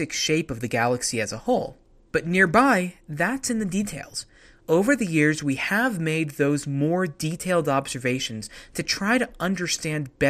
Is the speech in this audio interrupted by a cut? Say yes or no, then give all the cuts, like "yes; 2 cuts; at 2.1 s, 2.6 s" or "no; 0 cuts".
no; 0 cuts